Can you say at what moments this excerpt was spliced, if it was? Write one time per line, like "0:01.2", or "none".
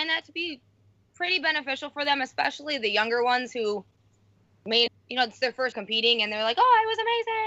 0:04.9
0:05.7